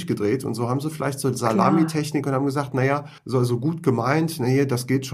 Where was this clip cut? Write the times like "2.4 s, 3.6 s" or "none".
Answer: 3.2 s